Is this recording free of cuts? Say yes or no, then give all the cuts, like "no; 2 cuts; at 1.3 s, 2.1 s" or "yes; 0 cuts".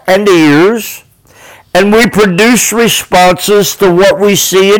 yes; 0 cuts